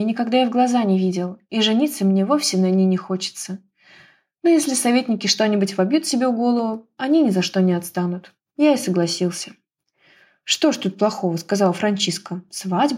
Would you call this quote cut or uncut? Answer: uncut